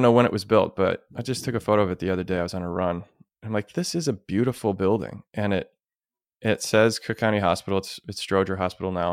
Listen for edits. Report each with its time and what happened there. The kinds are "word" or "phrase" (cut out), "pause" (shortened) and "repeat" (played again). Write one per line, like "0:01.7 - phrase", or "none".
none